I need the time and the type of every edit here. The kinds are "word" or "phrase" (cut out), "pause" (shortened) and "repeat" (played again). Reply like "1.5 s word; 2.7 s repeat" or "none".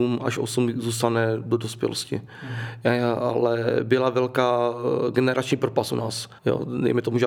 6.4 s pause